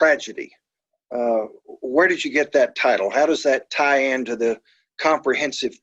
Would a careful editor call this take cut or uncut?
uncut